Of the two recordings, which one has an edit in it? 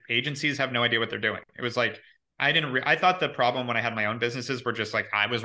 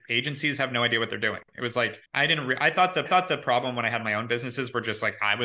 second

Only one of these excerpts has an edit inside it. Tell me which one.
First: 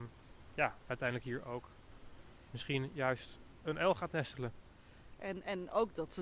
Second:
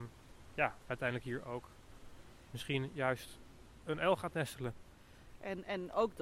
first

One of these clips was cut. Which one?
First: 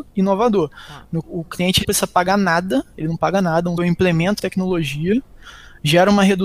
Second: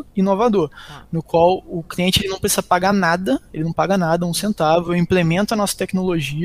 first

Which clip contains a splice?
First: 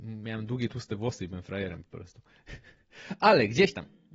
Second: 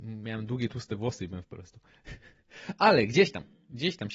second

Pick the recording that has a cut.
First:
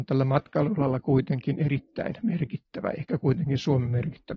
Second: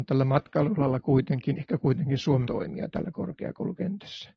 second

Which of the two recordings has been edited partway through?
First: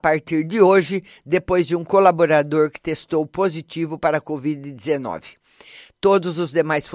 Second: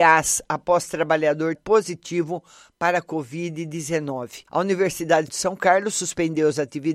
second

